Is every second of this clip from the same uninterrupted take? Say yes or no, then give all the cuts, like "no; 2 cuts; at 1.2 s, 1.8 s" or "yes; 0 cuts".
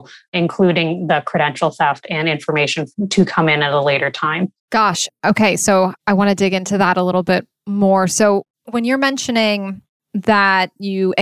no; 1 cut; at 4.6 s